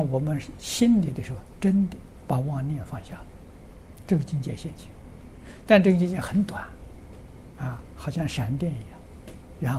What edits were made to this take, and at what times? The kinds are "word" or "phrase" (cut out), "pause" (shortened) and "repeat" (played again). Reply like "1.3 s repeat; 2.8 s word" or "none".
none